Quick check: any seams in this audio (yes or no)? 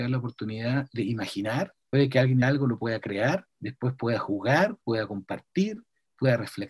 yes